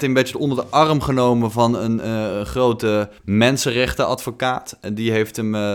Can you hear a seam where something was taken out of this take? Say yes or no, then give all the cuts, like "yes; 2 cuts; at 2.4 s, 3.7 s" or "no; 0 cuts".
yes; 1 cut; at 3.2 s